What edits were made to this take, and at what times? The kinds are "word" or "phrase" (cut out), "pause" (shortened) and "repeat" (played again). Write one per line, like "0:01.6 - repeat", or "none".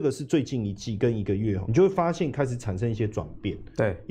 0:01.7 - word